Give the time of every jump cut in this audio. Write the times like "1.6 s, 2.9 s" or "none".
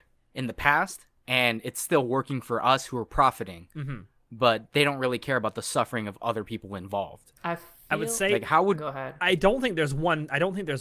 7.4 s